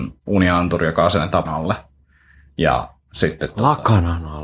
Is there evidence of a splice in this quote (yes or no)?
yes